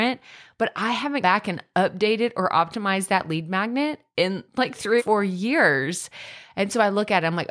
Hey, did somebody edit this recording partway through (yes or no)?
yes